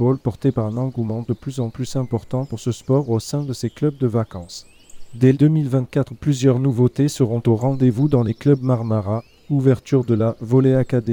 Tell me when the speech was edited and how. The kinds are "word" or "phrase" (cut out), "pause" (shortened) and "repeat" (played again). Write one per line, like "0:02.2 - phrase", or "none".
0:05.3 - word